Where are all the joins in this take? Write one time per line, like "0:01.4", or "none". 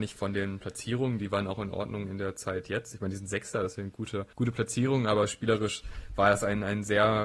0:04.3